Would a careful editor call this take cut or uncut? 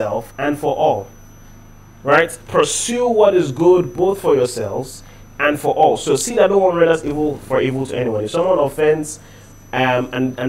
uncut